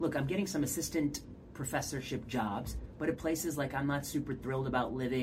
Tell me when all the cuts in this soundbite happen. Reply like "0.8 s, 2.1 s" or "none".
none